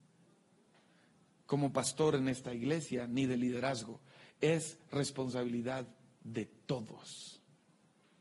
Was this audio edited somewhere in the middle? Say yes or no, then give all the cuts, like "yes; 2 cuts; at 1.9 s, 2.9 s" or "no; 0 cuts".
no; 0 cuts